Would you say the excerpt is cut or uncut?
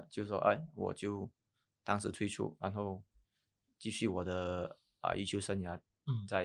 uncut